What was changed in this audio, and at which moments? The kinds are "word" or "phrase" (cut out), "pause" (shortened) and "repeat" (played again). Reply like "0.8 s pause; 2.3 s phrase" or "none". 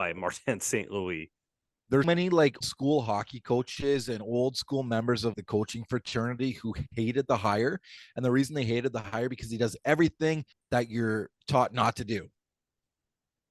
2.0 s word; 2.6 s word; 5.3 s word; 10.5 s pause

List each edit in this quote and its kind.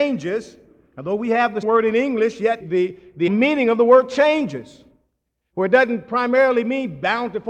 1.6 s word; 2.6 s word; 3.3 s word

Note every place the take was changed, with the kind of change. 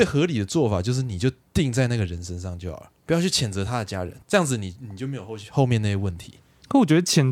3.0 s pause; 4.2 s pause

